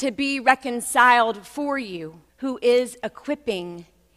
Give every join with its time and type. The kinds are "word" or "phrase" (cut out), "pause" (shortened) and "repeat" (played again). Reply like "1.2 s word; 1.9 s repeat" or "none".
2.3 s pause